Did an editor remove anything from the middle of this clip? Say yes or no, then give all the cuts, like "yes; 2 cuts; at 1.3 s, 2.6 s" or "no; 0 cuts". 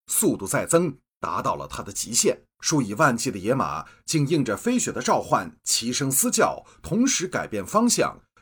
yes; 1 cut; at 2.5 s